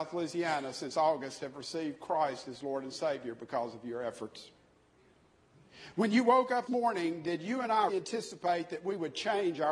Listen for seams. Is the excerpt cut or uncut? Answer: cut